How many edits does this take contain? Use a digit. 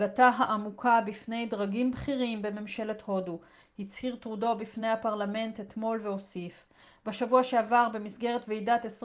0